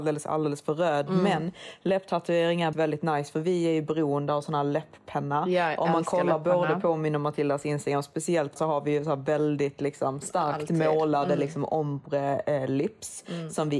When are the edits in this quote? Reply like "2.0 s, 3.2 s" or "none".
2.7 s, 8.6 s, 10.2 s